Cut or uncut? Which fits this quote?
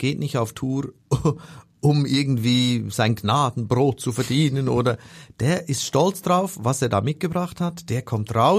uncut